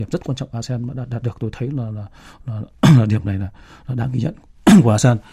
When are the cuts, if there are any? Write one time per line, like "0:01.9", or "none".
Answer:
none